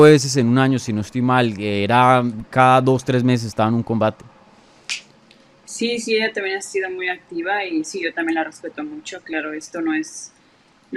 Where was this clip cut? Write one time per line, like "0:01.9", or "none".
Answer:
none